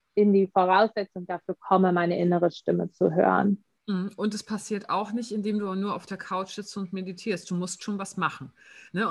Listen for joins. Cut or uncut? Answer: uncut